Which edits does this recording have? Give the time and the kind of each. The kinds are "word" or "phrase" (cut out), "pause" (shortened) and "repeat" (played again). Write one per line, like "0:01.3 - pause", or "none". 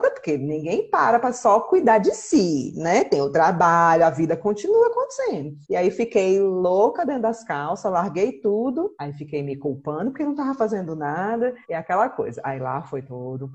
0:05.6 - pause
0:08.9 - pause
0:11.6 - pause